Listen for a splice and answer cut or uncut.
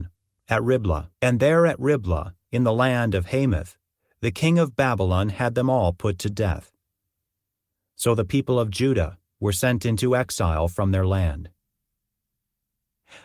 cut